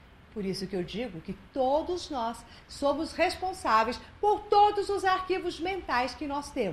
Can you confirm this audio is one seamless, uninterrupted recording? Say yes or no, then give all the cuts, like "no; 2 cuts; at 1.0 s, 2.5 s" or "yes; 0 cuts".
yes; 0 cuts